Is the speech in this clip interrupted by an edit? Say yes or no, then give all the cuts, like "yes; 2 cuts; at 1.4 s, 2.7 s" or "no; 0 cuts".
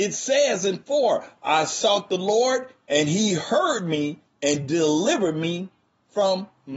no; 0 cuts